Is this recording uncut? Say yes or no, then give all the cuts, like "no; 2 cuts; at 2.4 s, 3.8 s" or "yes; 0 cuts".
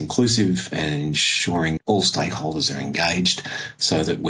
no; 1 cut; at 1.8 s